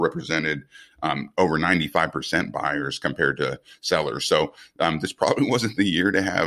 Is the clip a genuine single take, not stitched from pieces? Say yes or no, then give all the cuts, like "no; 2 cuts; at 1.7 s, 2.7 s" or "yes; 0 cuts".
yes; 0 cuts